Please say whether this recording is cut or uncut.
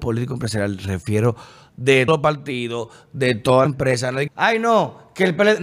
cut